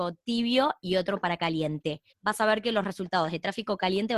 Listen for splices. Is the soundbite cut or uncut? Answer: cut